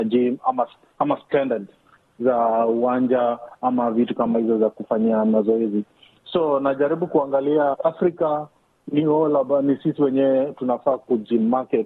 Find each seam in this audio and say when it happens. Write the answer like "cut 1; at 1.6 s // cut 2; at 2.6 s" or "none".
cut 1; at 7.7 s